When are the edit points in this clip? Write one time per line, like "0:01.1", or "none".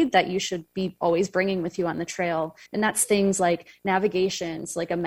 0:02.7